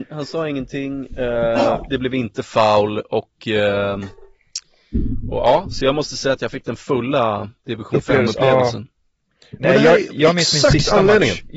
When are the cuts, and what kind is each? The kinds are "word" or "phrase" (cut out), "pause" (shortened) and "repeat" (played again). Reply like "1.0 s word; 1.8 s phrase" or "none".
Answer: 7.6 s pause

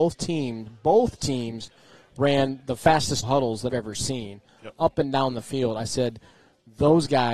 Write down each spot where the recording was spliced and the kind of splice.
3.2 s word; 3.7 s word

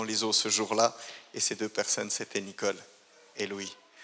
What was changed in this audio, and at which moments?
none

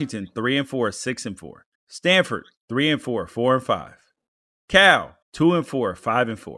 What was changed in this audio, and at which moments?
1.7 s pause; 5.2 s pause

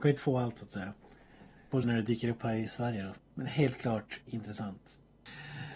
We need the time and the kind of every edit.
1.8 s word; 3.2 s pause

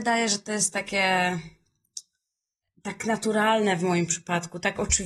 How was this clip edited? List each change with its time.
2.6 s pause

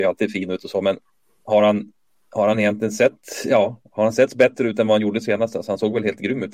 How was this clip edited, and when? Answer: none

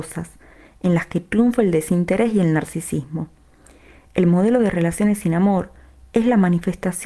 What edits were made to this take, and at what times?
none

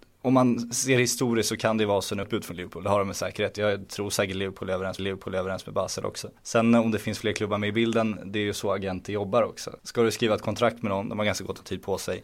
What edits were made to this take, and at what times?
2.2 s phrase; 5.0 s repeat; 6.4 s pause; 9.8 s pause

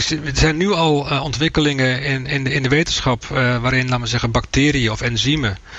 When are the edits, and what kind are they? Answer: none

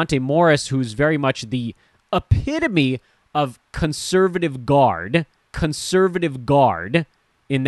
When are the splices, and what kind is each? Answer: 5.5 s repeat

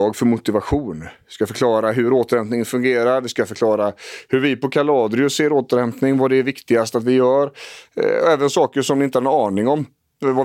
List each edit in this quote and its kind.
none

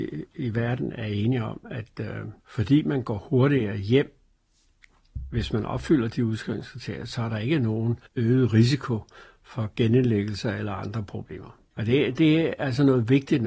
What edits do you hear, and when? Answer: 2.4 s pause; 8.1 s pause

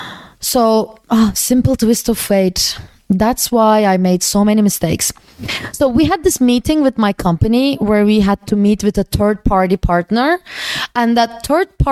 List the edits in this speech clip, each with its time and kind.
1.0 s pause

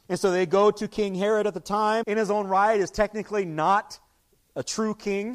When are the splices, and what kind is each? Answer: 2.0 s word

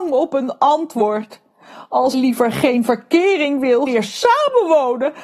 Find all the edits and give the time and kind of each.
2.1 s word; 3.9 s phrase

